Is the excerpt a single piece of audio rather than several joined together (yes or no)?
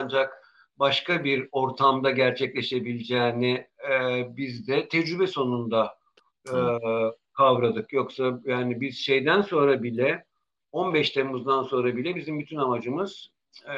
yes